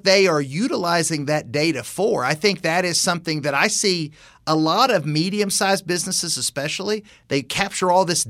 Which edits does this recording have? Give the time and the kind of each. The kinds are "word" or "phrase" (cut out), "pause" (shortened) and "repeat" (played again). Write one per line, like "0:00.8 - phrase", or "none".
none